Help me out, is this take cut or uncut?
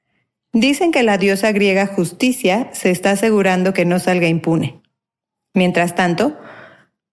uncut